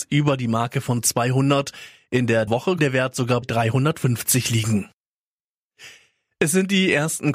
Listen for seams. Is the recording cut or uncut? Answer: cut